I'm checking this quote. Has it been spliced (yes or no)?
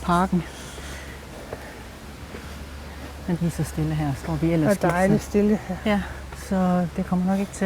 yes